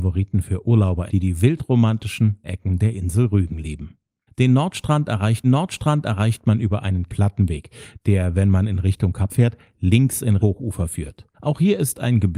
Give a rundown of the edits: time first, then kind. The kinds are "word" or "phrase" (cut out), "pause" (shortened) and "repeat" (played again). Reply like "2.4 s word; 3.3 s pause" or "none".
1.1 s word; 2.4 s word; 4.3 s pause; 5.4 s repeat; 7.1 s word; 9.3 s word; 10.4 s word; 11.3 s pause